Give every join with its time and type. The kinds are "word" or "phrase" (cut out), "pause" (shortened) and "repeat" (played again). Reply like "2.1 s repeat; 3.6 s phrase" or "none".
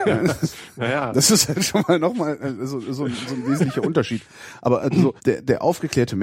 5.2 s pause